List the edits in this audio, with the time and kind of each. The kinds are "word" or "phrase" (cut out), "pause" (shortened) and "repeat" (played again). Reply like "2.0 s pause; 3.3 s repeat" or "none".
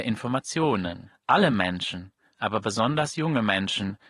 none